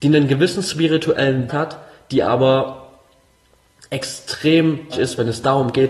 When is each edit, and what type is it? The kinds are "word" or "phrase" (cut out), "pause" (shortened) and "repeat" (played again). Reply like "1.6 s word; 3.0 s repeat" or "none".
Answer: 1.5 s word; 4.9 s word